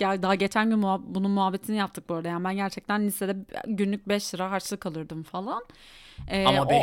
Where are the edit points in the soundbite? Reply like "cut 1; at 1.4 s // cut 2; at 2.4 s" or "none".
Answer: none